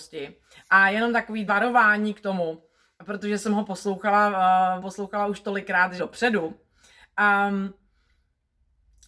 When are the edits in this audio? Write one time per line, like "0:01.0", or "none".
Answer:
0:01.5
0:04.8
0:06.0